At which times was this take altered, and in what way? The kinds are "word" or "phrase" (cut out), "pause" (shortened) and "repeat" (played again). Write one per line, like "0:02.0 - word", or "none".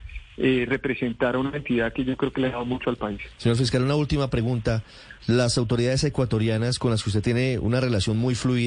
0:05.2 - pause